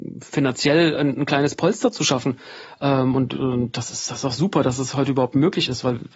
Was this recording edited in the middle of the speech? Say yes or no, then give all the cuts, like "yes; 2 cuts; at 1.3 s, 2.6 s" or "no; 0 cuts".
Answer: no; 0 cuts